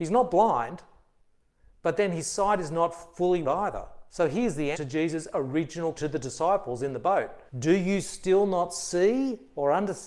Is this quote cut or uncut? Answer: cut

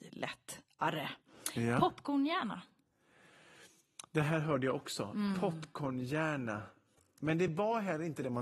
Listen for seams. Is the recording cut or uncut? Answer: uncut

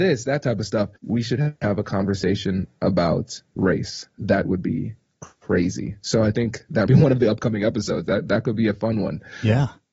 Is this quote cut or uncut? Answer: cut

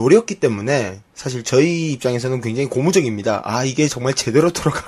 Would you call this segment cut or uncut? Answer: uncut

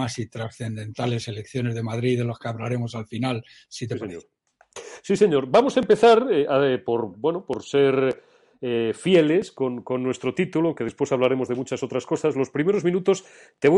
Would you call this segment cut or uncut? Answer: uncut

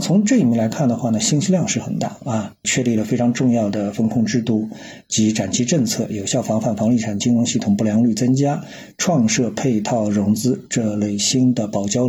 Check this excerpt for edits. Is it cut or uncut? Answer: uncut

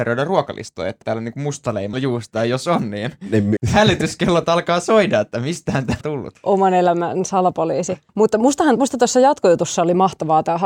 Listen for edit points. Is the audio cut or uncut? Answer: cut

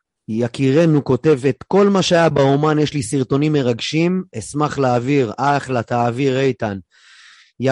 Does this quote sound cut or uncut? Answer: uncut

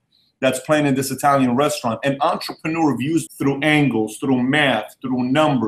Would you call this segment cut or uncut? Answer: cut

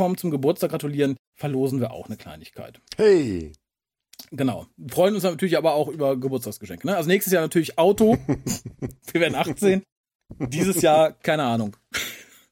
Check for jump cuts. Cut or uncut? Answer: cut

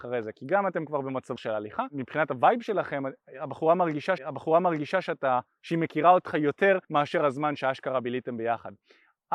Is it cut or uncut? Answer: cut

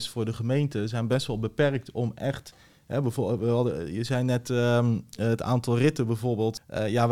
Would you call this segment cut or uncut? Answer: uncut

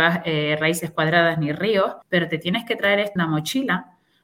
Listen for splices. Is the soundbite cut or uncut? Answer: cut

